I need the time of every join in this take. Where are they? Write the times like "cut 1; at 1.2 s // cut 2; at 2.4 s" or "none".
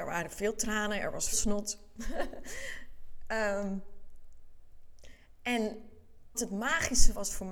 cut 1; at 1.3 s // cut 2; at 6.3 s